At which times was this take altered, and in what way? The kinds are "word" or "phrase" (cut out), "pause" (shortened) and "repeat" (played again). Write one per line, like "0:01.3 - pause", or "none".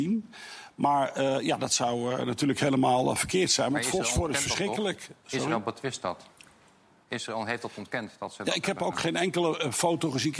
none